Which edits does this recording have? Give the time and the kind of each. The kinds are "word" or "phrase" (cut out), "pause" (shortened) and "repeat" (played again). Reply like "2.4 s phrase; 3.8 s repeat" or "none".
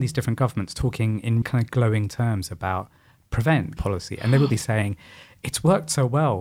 1.4 s word; 3.8 s word; 4.5 s word